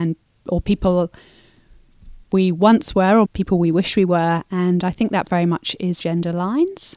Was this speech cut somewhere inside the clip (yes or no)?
yes